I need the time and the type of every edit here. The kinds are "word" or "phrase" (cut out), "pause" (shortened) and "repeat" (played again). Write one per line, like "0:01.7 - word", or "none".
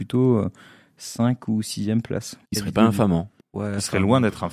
0:02.5 - pause
0:03.4 - pause